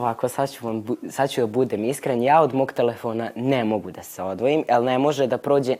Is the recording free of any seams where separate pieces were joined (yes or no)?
yes